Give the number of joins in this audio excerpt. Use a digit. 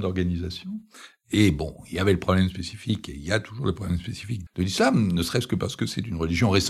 1